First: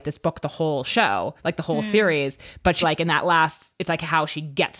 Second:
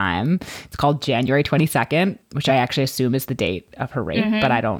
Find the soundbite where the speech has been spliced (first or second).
first